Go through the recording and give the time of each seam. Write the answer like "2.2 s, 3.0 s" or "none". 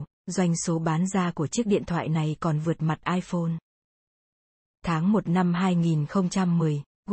none